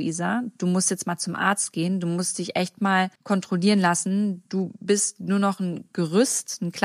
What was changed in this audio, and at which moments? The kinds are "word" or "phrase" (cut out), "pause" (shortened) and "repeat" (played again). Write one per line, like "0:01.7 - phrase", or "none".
0:03.2 - pause